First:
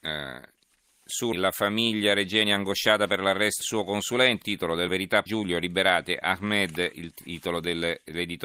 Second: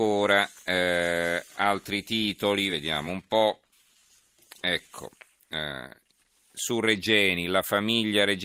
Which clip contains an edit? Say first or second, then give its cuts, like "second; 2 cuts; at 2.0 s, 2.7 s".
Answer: first; 6 cuts; at 1.3 s, 3.6 s, 4.4 s, 4.9 s, 5.3 s, 6.9 s